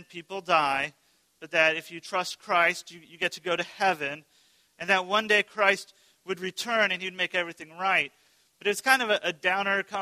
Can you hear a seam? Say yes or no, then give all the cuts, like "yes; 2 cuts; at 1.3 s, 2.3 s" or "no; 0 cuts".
no; 0 cuts